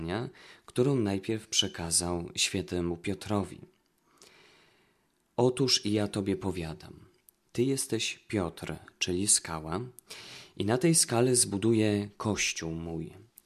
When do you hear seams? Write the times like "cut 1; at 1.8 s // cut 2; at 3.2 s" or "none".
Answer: none